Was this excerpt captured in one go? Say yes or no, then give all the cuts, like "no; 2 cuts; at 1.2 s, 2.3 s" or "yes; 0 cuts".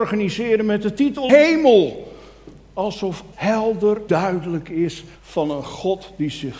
no; 4 cuts; at 1.3 s, 3.3 s, 4.1 s, 5.2 s